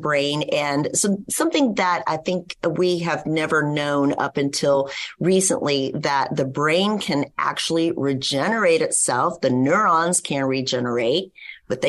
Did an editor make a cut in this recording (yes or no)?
no